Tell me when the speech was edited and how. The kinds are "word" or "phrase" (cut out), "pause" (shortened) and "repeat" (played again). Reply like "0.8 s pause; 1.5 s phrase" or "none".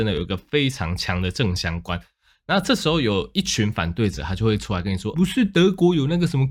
5.1 s word